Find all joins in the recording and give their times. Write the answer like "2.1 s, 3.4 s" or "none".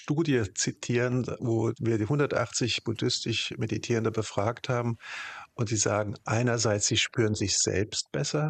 none